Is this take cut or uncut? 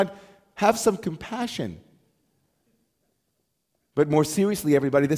uncut